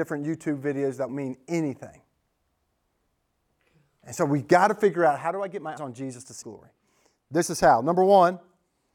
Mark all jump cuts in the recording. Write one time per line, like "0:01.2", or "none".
0:01.1
0:05.8
0:06.4